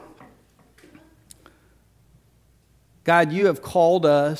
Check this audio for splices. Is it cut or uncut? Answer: uncut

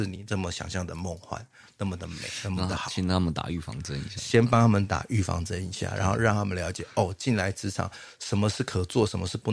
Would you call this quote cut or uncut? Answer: uncut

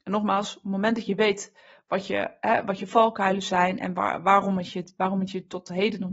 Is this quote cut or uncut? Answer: uncut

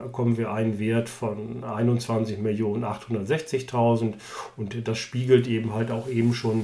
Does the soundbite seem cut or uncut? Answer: uncut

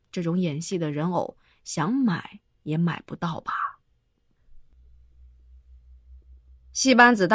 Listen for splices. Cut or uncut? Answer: uncut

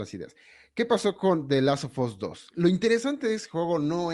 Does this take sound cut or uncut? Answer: uncut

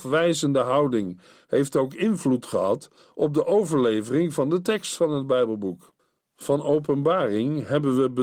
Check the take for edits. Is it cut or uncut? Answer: uncut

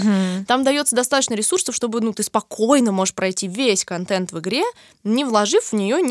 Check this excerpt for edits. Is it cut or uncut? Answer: uncut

